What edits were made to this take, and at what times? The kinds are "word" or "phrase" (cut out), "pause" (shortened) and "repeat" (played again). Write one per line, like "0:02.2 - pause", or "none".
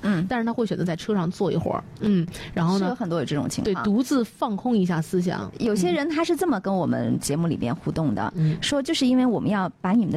0:02.0 - word